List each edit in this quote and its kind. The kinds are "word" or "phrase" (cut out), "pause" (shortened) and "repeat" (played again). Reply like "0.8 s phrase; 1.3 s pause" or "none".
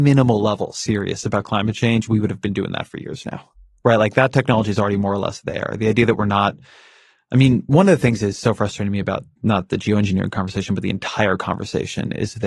none